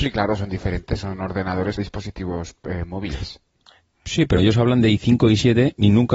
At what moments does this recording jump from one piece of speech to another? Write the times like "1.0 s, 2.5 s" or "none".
1.8 s, 4.4 s